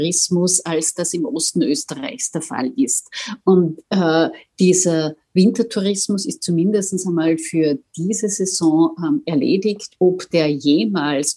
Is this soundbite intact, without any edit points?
yes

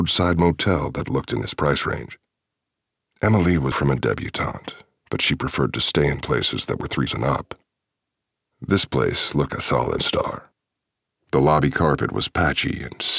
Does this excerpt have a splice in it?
yes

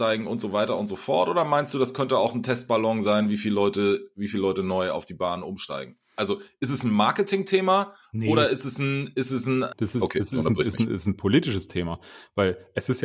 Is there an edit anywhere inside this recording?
no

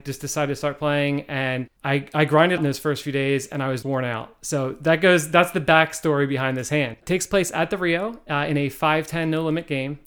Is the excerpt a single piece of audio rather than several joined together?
no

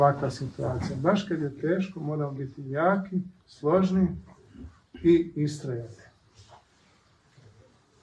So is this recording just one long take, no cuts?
no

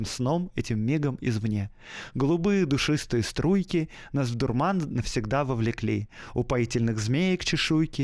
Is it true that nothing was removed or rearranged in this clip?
yes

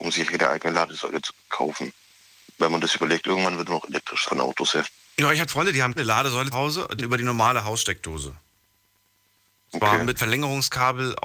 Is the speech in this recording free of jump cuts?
no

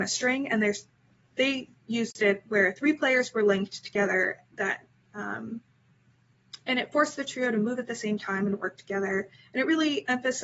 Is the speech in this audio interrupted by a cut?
no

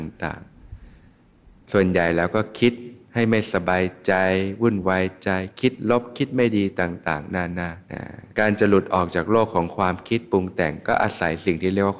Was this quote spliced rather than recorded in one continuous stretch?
yes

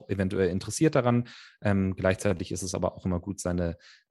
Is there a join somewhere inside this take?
no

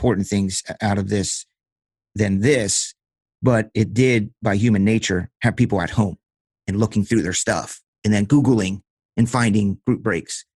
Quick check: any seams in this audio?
no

